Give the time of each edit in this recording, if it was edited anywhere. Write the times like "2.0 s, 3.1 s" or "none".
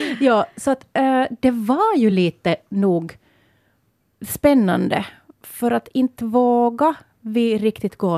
none